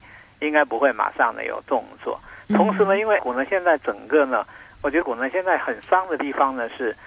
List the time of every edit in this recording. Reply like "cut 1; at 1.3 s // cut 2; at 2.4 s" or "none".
cut 1; at 3.2 s // cut 2; at 5.0 s